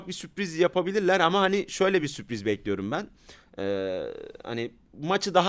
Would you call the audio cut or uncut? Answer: uncut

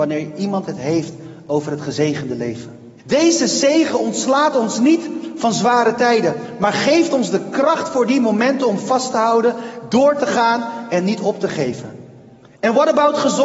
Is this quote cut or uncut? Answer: cut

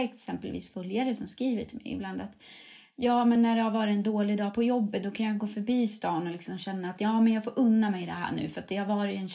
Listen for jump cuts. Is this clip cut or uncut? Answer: uncut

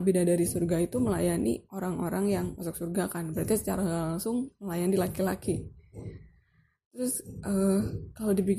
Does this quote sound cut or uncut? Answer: uncut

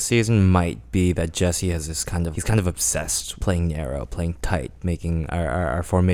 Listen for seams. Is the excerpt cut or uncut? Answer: cut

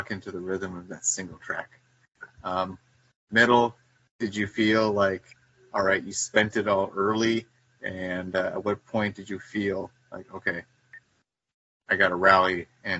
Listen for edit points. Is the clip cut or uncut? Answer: uncut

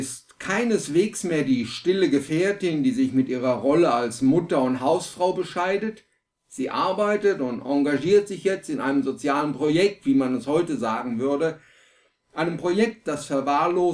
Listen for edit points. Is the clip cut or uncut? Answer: uncut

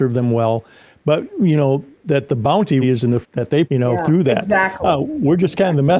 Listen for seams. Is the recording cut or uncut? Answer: cut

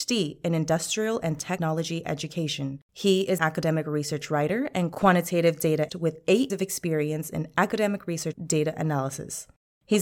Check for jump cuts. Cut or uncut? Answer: cut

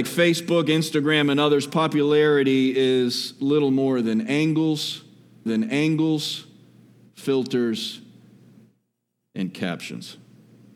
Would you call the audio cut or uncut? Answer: cut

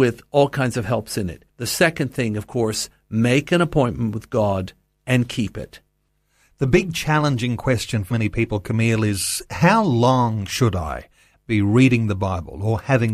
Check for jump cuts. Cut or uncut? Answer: cut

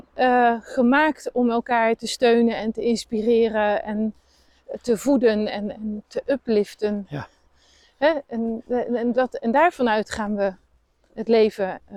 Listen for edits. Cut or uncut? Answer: uncut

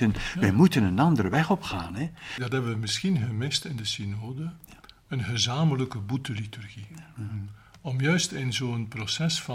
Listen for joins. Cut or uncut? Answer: cut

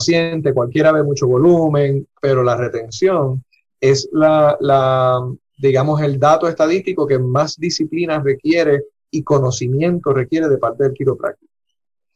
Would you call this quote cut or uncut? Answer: uncut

